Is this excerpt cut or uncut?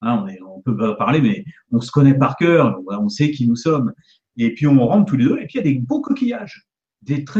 uncut